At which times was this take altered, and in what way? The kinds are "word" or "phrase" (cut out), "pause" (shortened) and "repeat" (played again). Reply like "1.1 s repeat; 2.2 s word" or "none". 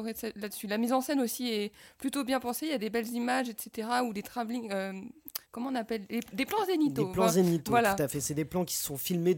5.4 s pause